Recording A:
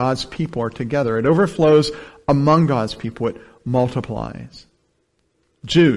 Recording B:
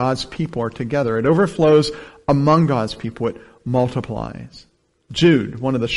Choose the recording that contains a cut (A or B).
B